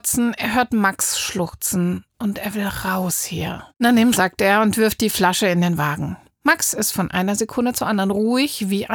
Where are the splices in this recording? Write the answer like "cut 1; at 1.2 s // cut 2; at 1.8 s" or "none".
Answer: cut 1; at 3.7 s // cut 2; at 4.1 s // cut 3; at 6.3 s